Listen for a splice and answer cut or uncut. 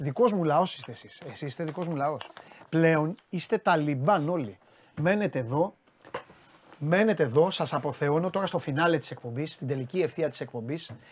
uncut